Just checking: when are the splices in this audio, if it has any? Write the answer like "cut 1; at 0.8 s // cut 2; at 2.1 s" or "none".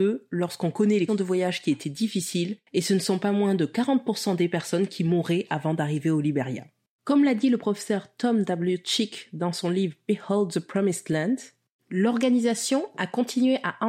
cut 1; at 1.1 s